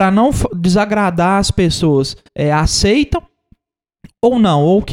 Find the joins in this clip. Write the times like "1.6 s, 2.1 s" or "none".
2.2 s